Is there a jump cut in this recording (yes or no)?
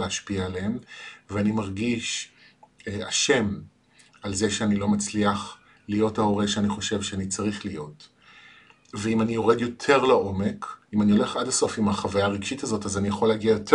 no